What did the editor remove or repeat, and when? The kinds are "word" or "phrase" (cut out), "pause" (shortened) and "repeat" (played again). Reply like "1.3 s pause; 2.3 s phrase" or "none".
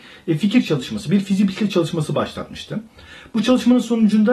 none